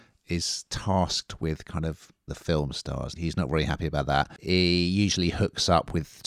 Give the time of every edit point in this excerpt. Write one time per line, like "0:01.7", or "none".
0:02.3
0:03.2
0:04.4